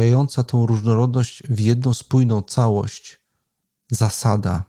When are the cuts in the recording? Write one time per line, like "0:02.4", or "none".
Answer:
none

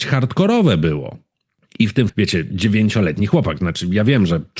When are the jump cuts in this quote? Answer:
0:02.1

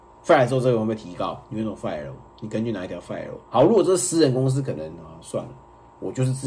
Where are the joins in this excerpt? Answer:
0:01.4
0:02.3

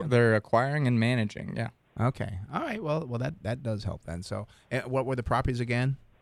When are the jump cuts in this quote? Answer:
none

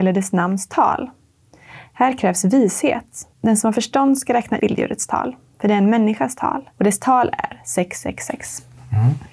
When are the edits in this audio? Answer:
0:03.3
0:04.6
0:06.7

